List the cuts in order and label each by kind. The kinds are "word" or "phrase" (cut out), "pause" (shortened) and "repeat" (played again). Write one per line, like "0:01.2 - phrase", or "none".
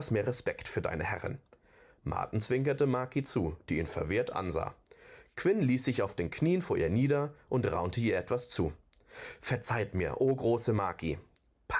none